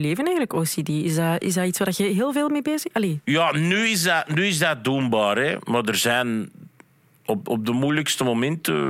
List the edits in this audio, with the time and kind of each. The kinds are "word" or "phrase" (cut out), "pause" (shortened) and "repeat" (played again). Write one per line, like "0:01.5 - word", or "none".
none

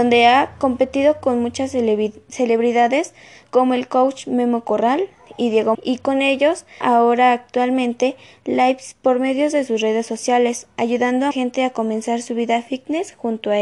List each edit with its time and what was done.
0:05.7 - word
0:06.8 - word
0:11.3 - word

